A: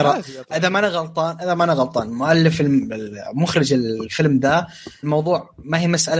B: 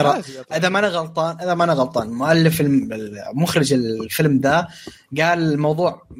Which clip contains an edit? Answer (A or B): A